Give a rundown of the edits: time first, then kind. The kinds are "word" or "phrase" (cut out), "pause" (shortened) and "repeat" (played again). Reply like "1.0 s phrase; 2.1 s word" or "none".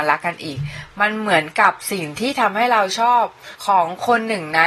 3.5 s pause